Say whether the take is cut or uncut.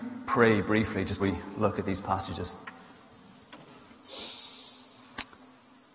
cut